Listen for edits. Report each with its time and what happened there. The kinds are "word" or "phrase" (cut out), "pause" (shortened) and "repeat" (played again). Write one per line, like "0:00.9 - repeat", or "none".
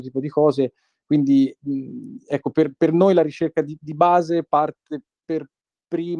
none